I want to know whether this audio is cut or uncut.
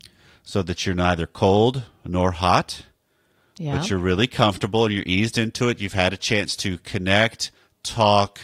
uncut